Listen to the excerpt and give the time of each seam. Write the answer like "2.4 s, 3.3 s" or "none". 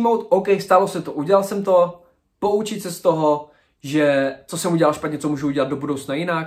none